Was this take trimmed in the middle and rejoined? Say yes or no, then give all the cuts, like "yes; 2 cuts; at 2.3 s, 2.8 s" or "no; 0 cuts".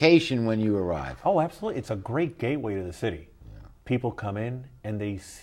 no; 0 cuts